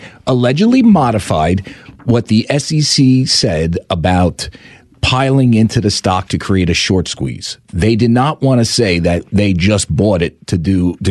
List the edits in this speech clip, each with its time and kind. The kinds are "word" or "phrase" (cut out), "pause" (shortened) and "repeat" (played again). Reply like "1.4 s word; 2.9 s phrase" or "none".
none